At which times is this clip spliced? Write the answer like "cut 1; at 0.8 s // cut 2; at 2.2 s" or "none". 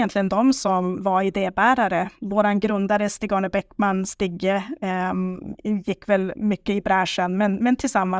none